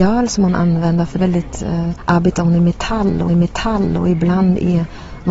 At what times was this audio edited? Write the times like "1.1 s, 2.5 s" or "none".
1.2 s, 2.0 s, 3.3 s